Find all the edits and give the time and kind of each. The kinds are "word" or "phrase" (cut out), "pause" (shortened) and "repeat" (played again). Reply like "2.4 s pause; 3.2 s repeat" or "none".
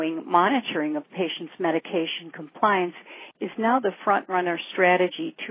none